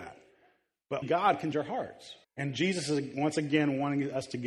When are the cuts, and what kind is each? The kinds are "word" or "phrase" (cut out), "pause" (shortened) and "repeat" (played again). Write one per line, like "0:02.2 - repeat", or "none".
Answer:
0:01.0 - word
0:01.5 - word
0:02.2 - pause